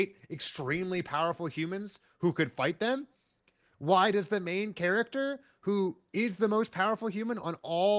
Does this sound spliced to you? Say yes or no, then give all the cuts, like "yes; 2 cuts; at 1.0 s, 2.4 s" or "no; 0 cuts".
no; 0 cuts